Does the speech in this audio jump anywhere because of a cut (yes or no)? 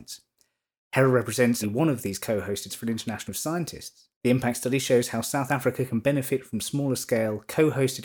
yes